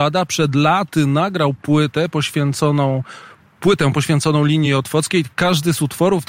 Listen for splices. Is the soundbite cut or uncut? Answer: uncut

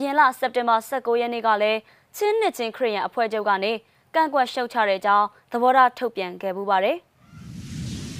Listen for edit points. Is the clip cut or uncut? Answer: uncut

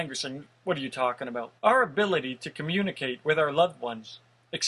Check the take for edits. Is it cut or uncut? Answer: cut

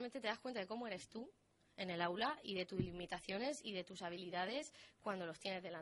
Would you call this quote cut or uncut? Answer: uncut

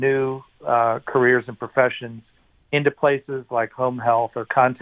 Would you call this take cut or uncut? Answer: uncut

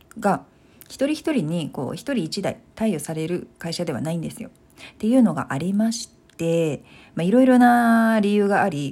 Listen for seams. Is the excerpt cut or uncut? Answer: uncut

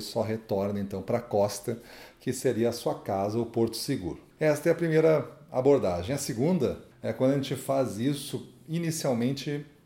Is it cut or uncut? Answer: cut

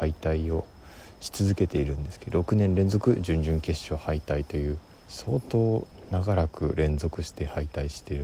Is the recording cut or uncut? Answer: cut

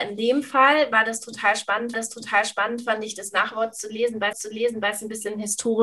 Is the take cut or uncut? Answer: cut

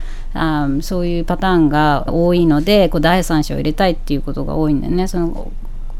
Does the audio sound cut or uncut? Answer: cut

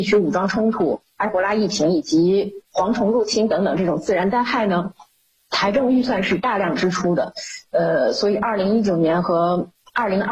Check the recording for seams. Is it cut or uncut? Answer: uncut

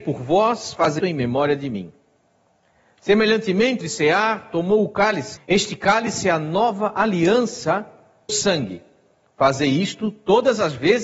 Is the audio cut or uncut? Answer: cut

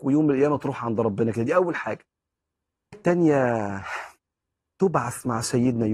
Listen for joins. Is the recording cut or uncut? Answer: cut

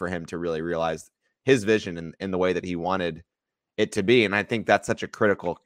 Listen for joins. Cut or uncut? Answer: uncut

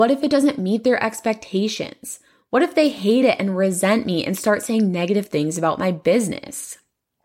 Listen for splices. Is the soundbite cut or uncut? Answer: uncut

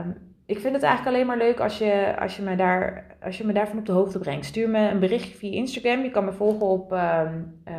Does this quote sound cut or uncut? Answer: uncut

